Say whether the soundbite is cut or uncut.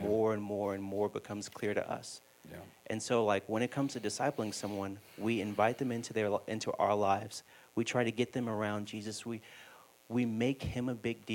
uncut